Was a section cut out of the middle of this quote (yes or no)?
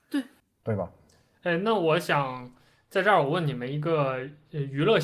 no